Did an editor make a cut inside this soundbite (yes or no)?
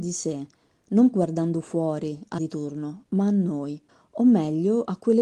yes